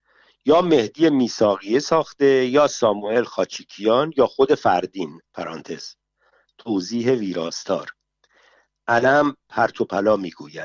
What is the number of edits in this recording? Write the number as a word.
one